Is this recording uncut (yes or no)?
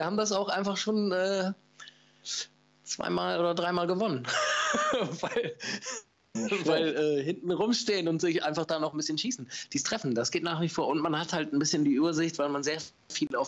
yes